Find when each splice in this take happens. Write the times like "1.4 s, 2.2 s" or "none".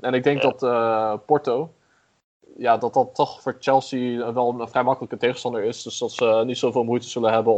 none